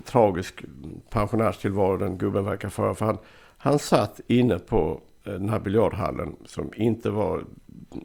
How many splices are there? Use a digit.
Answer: 0